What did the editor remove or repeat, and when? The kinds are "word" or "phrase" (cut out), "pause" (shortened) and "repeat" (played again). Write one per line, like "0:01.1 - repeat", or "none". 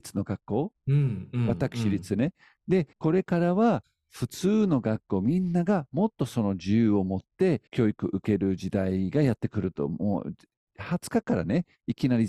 0:02.9 - pause
0:07.7 - pause